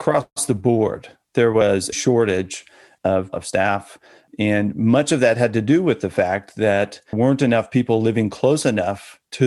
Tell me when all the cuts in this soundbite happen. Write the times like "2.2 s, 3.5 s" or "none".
1.9 s, 3.3 s, 7.1 s

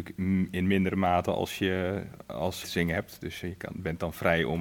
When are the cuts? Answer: 2.6 s

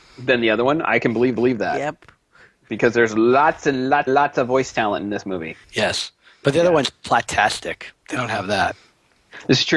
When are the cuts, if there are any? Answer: 1.4 s, 4.1 s, 5.6 s

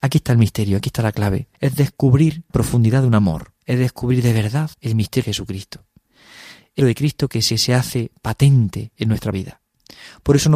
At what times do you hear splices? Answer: 1.5 s, 2.5 s, 3.6 s, 4.7 s, 5.2 s, 6.8 s, 7.5 s, 9.3 s

